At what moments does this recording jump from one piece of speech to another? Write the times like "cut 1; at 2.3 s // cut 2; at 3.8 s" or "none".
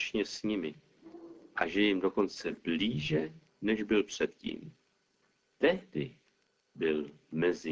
none

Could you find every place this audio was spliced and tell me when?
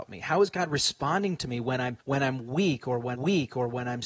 cut 1; at 2.0 s // cut 2; at 3.2 s

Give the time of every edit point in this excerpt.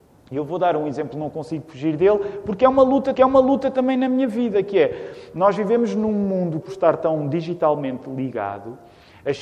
cut 1; at 3.1 s // cut 2; at 6.6 s

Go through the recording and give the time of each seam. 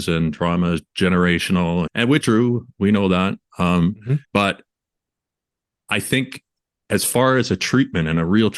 cut 1; at 1.9 s // cut 2; at 2.2 s // cut 3; at 4.2 s

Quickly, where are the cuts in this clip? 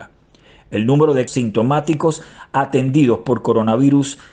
cut 1; at 1.3 s

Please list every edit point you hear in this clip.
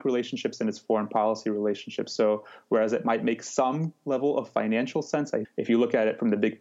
cut 1; at 5.4 s

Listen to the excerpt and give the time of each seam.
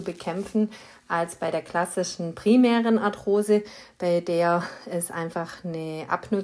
none

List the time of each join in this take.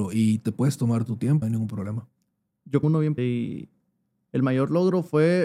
cut 1; at 1.4 s // cut 2; at 2.8 s // cut 3; at 3.2 s

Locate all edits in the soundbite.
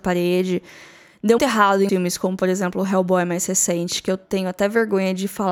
cut 1; at 1.4 s // cut 2; at 1.9 s

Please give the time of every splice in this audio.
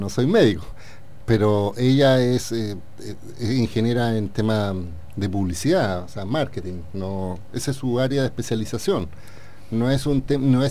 none

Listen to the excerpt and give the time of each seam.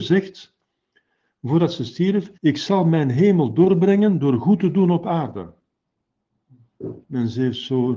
cut 1; at 2.4 s // cut 2; at 7.0 s

